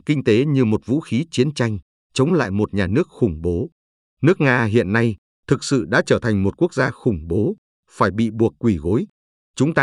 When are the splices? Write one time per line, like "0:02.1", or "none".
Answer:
none